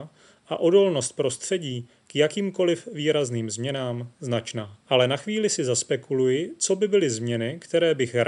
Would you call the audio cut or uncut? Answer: cut